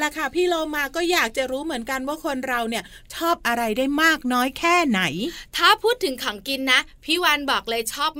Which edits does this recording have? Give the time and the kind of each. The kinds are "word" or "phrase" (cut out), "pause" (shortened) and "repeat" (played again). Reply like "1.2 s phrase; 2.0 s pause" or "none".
5.5 s pause

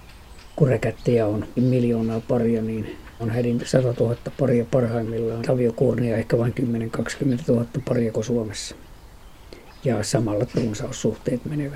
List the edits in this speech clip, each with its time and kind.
1.6 s word; 3.2 s word; 3.6 s word; 5.4 s word; 8.1 s word; 10.5 s word

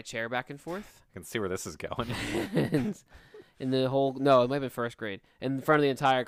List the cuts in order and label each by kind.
1.1 s pause

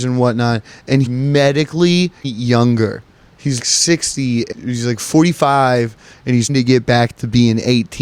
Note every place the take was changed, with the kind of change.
1.1 s word; 2.2 s word; 3.6 s word; 4.5 s word; 6.5 s word

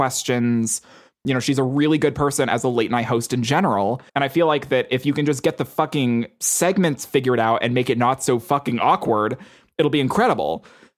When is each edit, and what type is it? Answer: 4.1 s pause

